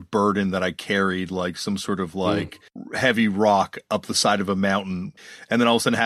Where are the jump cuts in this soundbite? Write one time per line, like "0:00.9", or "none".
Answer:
0:02.7